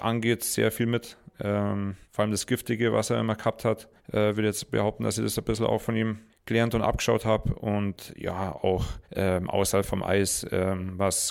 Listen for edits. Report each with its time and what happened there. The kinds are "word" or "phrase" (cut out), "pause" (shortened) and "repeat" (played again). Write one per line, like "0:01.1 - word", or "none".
0:02.0 - pause
0:04.0 - pause
0:06.3 - pause
0:09.0 - pause